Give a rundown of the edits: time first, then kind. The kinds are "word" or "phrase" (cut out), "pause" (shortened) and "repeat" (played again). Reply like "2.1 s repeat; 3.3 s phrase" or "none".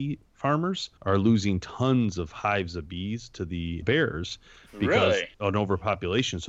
1.0 s pause; 3.8 s word; 5.3 s pause